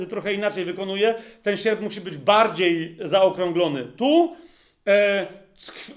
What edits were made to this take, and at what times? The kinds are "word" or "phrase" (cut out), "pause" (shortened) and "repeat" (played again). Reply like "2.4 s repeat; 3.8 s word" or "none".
none

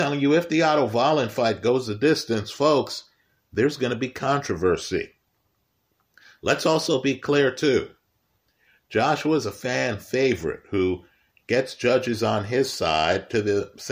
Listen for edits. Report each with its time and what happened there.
none

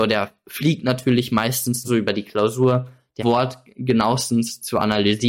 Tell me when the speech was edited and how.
1.8 s word; 3.2 s phrase

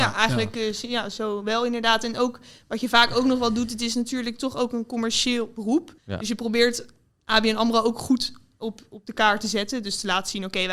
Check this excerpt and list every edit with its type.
6.0 s pause

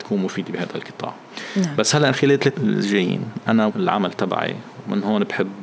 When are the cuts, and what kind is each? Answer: 2.1 s word; 2.5 s word; 3.7 s word

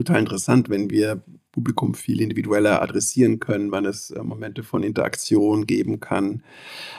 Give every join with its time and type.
none

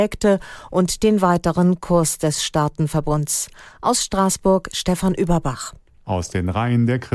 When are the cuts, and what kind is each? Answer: none

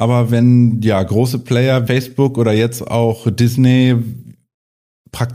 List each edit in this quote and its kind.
1.9 s phrase

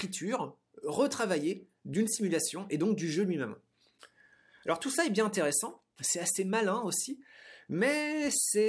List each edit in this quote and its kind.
none

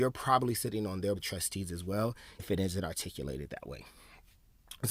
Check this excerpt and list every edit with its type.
1.2 s word; 2.4 s word

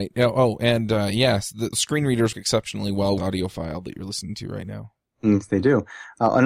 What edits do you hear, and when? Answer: 1.7 s word; 2.3 s word; 3.2 s phrase

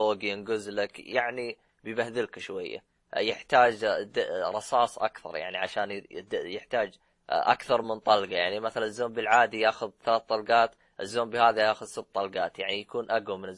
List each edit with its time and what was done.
none

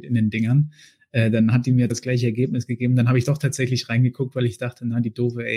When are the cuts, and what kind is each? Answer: 1.9 s word

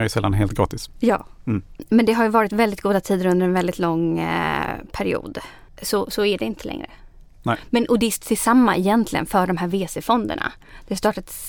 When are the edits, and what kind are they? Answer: none

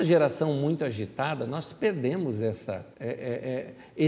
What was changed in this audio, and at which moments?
2.9 s pause

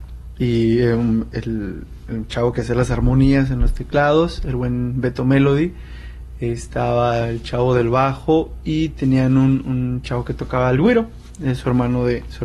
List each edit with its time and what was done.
none

